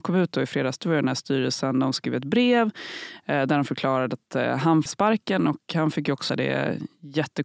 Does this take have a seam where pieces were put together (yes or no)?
yes